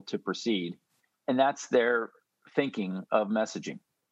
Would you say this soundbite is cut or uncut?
uncut